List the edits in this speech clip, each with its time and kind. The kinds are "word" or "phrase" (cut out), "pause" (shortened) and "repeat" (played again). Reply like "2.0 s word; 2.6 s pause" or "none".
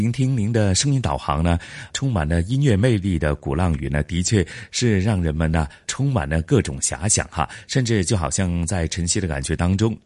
1.9 s word; 5.8 s word